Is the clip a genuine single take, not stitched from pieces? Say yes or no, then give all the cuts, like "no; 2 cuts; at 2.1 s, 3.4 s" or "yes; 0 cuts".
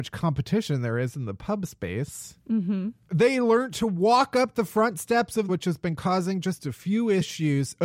no; 1 cut; at 5.5 s